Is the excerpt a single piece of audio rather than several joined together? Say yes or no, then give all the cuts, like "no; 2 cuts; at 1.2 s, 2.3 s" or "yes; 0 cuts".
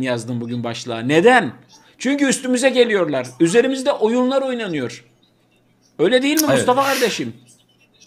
yes; 0 cuts